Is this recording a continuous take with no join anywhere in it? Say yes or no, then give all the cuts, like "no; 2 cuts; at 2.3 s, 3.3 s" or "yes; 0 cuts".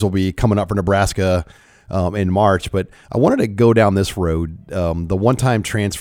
yes; 0 cuts